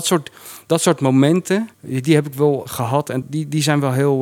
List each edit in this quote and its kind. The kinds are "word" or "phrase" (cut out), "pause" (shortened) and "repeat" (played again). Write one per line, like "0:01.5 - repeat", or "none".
0:01.7 - pause
0:02.7 - word
0:03.2 - word